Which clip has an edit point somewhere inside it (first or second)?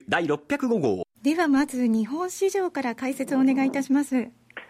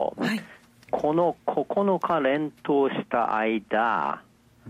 first